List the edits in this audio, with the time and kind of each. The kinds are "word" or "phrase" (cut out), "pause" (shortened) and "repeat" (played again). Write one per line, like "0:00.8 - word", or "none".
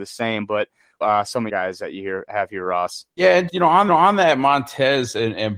0:01.0 - phrase
0:01.5 - phrase
0:03.1 - pause
0:03.5 - word
0:03.9 - repeat

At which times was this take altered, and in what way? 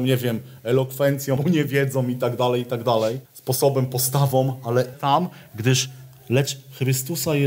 0:01.4 - word
0:03.3 - pause
0:04.9 - word

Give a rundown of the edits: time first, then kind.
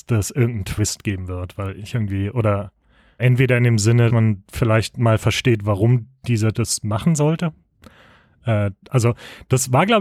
0:03.2 - word
0:04.1 - word
0:06.5 - word

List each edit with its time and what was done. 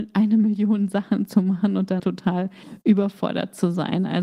0:02.0 - phrase

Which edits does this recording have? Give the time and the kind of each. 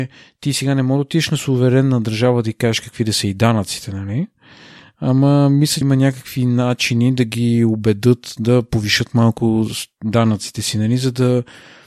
0:05.8 - word

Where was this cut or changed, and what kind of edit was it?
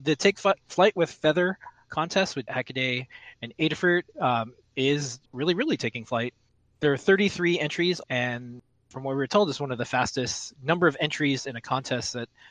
0:02.5 - word
0:05.3 - pause
0:08.0 - word
0:10.6 - word

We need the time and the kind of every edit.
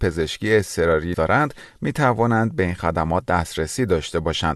0:01.1 - word

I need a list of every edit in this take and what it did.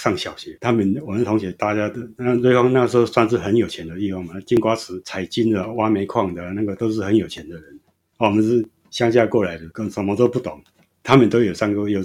none

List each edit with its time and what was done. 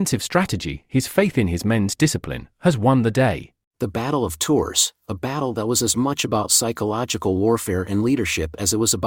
none

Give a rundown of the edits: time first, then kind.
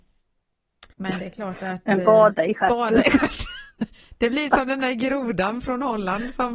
0:00.9 - pause

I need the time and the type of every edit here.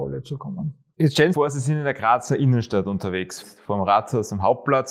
0:01.3 - phrase
0:03.4 - word

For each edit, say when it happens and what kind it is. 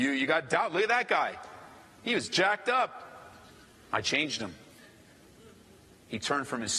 none

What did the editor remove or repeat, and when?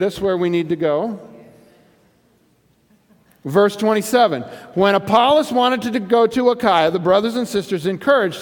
none

